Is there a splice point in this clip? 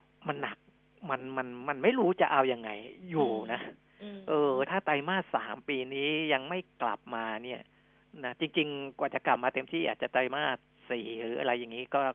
no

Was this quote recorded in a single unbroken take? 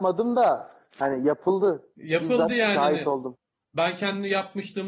yes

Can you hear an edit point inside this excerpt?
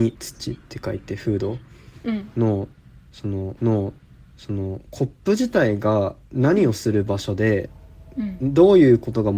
yes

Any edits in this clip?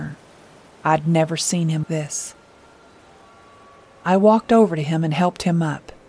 yes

